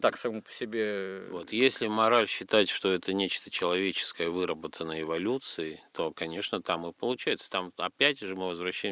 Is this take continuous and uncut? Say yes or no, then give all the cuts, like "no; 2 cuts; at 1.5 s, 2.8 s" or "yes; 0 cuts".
yes; 0 cuts